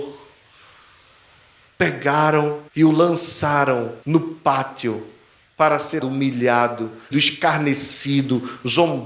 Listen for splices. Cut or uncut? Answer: cut